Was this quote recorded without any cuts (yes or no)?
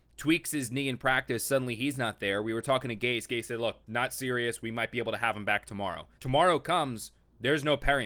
no